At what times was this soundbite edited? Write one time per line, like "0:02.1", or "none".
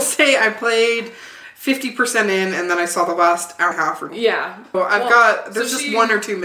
0:03.7
0:04.1
0:04.7